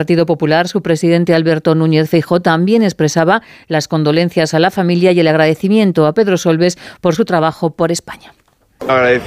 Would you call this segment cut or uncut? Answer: uncut